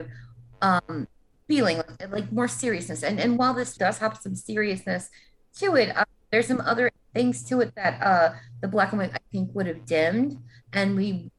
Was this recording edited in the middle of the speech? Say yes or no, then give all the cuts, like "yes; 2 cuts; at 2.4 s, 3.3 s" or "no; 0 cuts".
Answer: yes; 1 cut; at 3.8 s